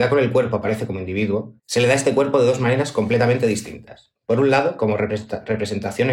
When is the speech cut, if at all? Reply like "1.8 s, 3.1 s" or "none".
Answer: 1.6 s, 4.2 s